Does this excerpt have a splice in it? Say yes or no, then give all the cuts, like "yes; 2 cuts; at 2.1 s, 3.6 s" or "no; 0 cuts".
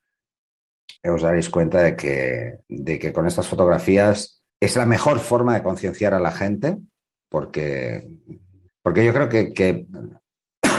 yes; 4 cuts; at 1.0 s, 2.6 s, 4.5 s, 8.7 s